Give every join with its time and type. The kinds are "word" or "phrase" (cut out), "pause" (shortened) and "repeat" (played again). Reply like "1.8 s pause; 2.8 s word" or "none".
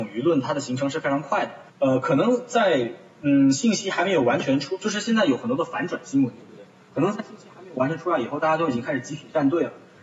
1.7 s pause